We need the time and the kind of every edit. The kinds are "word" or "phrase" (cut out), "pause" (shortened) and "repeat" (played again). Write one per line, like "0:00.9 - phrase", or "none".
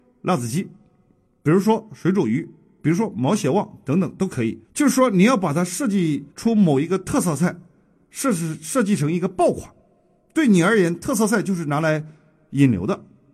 0:04.6 - pause
0:06.3 - pause